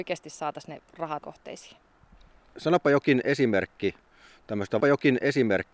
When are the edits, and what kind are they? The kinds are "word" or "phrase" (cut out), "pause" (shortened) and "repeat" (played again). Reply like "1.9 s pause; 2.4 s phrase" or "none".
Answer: 1.2 s phrase; 4.8 s repeat